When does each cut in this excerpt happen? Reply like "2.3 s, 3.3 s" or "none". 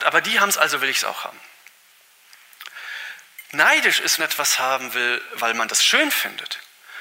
4.2 s